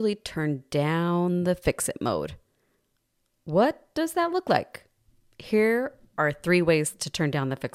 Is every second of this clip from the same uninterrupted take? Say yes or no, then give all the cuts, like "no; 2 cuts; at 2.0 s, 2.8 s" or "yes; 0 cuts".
yes; 0 cuts